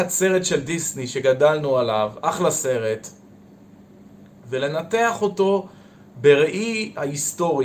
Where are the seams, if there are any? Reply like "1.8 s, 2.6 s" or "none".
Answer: none